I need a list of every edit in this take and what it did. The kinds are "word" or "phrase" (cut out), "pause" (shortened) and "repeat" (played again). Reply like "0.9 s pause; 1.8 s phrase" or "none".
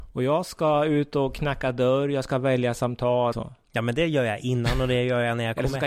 3.3 s word